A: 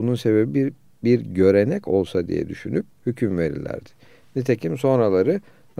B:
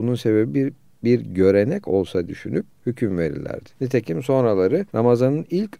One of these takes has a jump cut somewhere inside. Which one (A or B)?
B